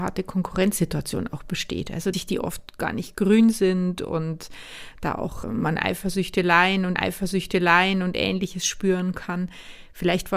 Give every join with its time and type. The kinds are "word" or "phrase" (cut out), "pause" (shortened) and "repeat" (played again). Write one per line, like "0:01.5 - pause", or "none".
0:02.1 - word
0:05.4 - word
0:07.0 - repeat